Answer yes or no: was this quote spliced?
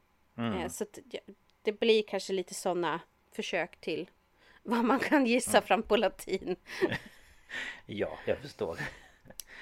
no